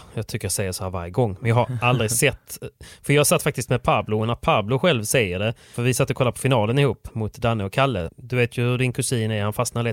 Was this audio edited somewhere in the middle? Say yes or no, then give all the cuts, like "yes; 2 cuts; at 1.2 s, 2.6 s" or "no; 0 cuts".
no; 0 cuts